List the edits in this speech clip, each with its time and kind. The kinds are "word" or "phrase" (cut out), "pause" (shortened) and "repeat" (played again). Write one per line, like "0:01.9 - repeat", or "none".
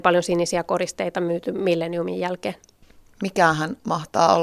none